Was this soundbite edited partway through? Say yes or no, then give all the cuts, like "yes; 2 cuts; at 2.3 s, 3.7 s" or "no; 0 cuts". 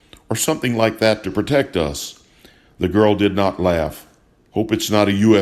no; 0 cuts